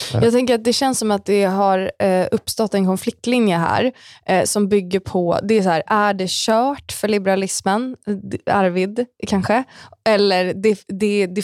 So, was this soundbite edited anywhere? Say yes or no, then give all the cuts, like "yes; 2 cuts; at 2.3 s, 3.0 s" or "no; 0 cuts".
no; 0 cuts